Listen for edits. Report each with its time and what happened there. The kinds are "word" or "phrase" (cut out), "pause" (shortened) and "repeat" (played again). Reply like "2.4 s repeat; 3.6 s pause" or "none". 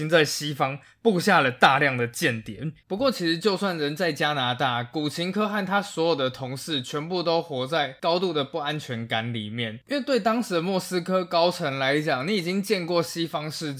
2.8 s pause